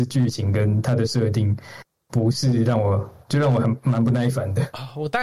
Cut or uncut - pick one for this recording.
uncut